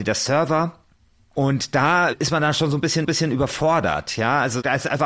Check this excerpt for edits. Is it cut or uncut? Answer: cut